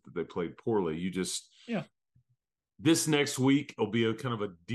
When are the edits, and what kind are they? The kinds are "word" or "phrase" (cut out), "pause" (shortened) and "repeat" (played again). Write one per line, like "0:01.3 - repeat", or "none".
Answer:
none